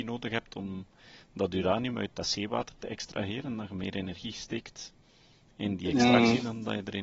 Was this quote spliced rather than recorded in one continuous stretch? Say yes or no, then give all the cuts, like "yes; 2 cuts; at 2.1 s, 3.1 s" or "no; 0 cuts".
no; 0 cuts